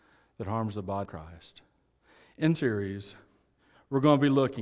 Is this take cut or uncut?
cut